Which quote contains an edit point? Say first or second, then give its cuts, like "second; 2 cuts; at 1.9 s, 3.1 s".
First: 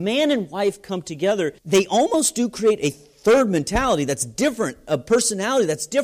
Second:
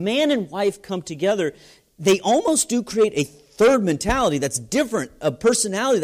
first; 1 cut; at 1.6 s